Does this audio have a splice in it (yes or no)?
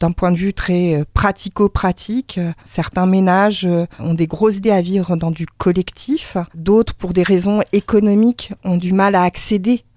yes